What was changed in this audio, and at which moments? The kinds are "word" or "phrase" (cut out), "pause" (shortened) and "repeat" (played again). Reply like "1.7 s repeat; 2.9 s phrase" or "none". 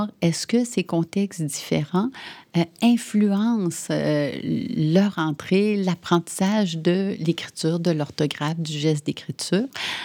none